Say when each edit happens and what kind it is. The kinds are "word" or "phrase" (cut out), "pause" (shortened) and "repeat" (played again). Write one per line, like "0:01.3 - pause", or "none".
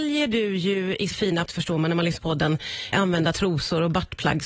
0:01.1 - word
0:01.5 - word
0:02.2 - word
0:02.9 - word